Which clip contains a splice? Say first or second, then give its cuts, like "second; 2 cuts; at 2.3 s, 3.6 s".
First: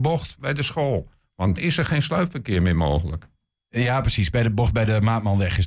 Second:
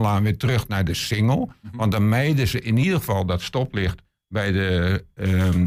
first; 1 cut; at 1.6 s